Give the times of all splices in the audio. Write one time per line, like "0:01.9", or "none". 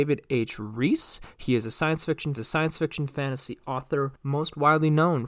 0:02.4
0:04.2